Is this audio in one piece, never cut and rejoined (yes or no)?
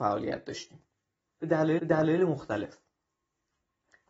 no